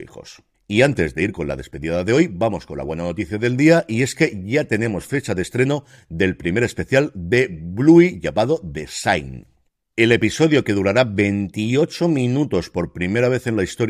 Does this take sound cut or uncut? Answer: uncut